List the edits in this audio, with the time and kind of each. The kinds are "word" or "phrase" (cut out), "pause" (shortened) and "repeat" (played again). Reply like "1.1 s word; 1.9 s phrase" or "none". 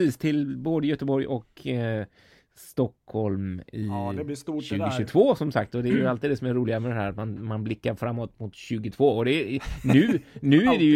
none

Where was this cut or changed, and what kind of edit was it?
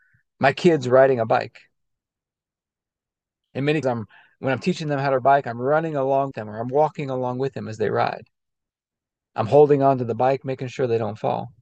3.8 s word; 5.2 s word; 6.3 s word

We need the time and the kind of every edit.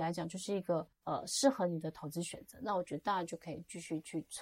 0.9 s pause

